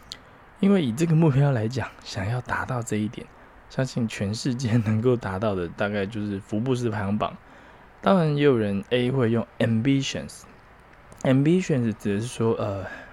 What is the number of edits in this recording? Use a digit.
0